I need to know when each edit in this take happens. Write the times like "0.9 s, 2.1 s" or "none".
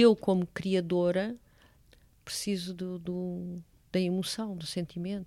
none